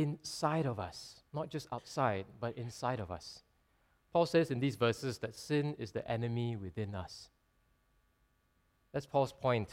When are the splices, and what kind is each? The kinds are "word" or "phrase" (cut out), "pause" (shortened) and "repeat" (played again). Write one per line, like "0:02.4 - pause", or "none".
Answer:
0:01.3 - pause